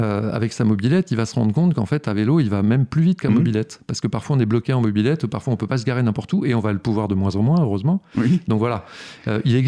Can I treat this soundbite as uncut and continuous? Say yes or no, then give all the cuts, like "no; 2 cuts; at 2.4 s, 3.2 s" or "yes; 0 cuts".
yes; 0 cuts